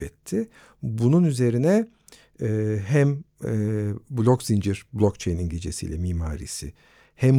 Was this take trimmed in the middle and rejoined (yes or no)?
no